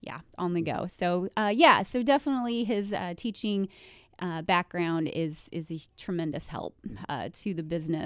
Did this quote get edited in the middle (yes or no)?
no